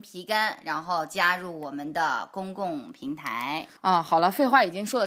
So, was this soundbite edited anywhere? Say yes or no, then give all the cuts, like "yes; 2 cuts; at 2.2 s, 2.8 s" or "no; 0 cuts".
yes; 1 cut; at 3.8 s